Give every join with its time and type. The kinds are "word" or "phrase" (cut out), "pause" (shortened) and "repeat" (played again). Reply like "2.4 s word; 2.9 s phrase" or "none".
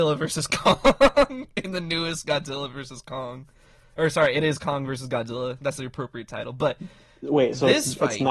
none